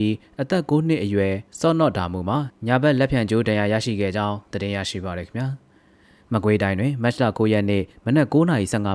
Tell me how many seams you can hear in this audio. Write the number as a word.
zero